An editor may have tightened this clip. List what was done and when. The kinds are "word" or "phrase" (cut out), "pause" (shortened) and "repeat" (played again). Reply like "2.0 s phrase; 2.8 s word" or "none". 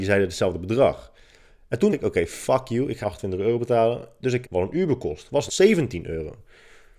1.9 s word; 3.0 s word; 4.4 s word; 5.5 s word